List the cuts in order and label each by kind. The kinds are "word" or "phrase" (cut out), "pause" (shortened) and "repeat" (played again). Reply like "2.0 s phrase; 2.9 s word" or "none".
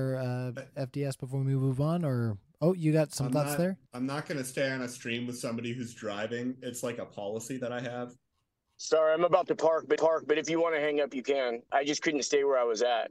3.9 s pause; 10.0 s repeat

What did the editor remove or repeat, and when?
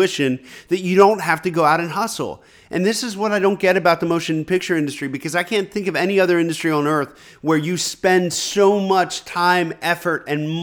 none

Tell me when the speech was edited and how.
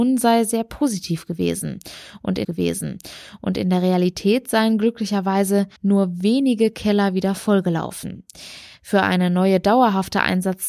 2.4 s repeat; 5.8 s pause

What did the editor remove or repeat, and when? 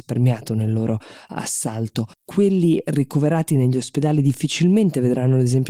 2.1 s pause

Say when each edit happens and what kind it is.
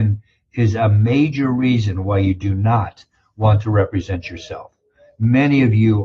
none

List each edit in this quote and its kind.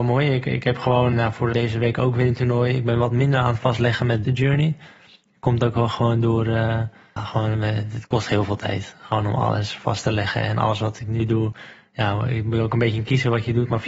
1.1 s word; 1.5 s word; 4.2 s phrase; 7.2 s word

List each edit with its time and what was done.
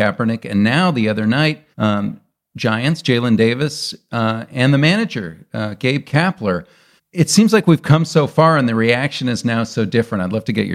1.7 s pause; 7.0 s pause

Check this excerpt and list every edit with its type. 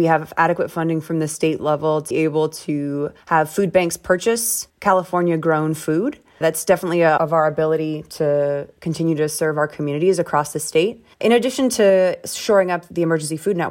2.1 s word; 3.2 s pause; 4.7 s pause; 6.4 s word; 7.2 s phrase; 11.1 s pause

